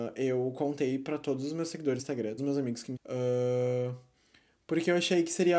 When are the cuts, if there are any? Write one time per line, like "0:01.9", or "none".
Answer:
0:02.0
0:02.4
0:03.0